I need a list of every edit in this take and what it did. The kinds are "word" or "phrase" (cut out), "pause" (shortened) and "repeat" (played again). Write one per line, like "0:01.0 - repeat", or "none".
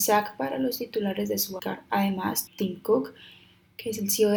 0:01.6 - word
0:02.5 - word